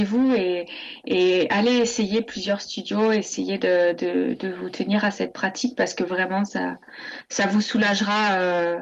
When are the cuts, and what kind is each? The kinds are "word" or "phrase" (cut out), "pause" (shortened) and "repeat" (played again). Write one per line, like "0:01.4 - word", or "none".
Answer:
none